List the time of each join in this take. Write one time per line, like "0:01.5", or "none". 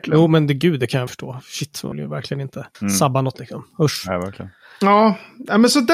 0:01.1
0:01.9
0:02.7
0:03.3